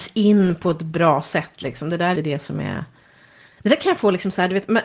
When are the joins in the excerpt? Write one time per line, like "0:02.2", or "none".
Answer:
0:02.2